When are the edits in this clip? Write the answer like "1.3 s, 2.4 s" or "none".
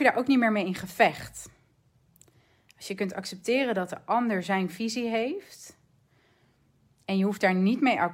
none